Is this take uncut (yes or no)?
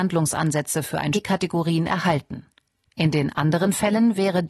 no